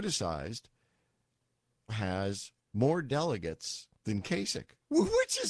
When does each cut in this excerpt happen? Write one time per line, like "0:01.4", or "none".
0:01.9
0:03.9